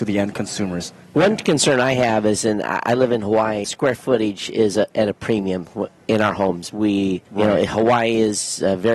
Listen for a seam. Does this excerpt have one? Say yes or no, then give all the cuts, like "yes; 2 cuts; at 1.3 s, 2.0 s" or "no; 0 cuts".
yes; 3 cuts; at 3.6 s, 6.7 s, 7.3 s